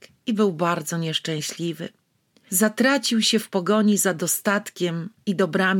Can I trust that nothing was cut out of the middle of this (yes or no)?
yes